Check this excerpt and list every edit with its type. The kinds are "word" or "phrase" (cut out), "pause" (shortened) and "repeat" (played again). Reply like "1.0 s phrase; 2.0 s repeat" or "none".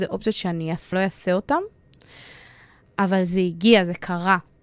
0.9 s phrase